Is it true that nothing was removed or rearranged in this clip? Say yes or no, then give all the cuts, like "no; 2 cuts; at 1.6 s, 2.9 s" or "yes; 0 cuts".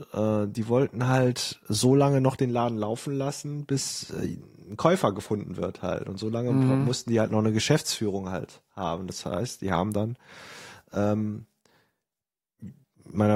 yes; 0 cuts